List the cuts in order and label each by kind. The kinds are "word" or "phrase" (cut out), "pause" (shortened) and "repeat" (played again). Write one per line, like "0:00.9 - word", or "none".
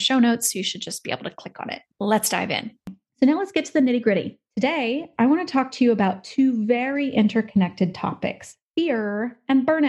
0:01.9 - pause